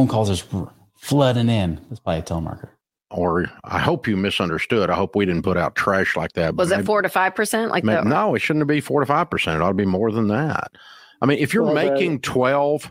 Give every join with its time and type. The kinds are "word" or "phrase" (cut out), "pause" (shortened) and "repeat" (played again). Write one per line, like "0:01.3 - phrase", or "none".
none

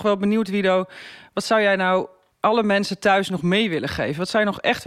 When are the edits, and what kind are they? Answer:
0:02.3 - pause

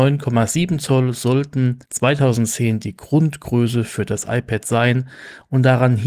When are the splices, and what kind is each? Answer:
0:01.8 - pause

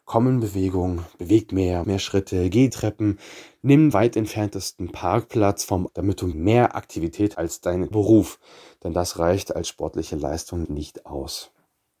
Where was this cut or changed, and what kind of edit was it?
0:01.5 - word
0:01.8 - word
0:02.7 - word
0:03.9 - word
0:05.9 - word
0:06.3 - word
0:07.3 - word
0:07.9 - word
0:10.6 - word

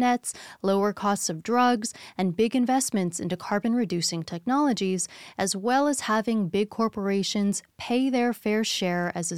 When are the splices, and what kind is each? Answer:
none

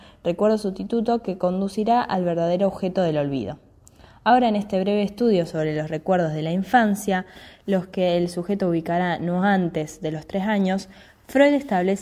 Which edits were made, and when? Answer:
none

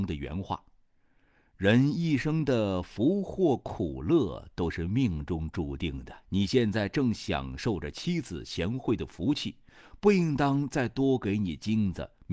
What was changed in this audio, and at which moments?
0:06.2 - pause

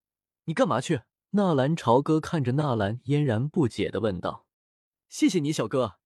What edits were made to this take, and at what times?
0:01.2 - pause
0:04.5 - pause

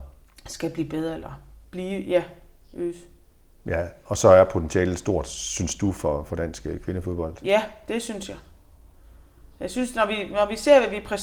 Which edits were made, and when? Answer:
none

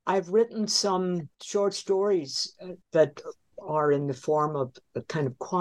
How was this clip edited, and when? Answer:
0:01.3 - pause
0:02.8 - pause

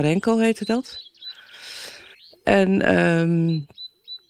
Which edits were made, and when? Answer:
0:02.1 - pause

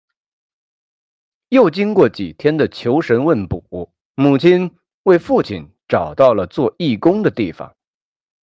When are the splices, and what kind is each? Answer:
0:04.0 - pause

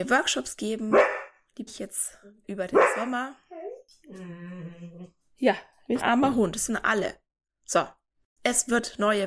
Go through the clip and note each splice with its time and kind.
0:01.7 - word
0:02.4 - word
0:06.0 - word
0:06.7 - word
0:08.4 - word

